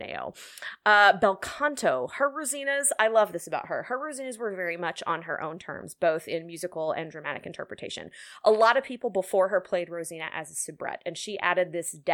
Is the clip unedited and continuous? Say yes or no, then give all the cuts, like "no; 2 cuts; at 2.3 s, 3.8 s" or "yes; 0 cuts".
yes; 0 cuts